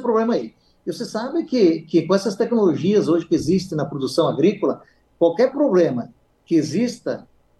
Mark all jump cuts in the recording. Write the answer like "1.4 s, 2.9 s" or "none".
none